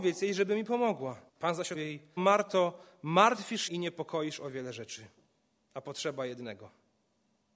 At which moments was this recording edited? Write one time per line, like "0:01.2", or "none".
0:01.3
0:01.7
0:02.2
0:03.7